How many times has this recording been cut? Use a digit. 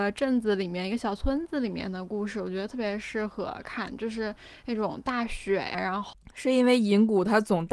1